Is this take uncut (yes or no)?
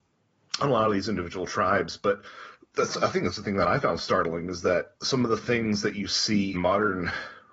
no